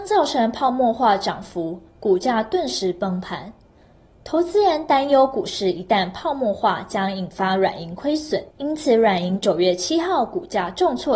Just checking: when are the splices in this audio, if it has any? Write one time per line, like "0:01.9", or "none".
0:08.5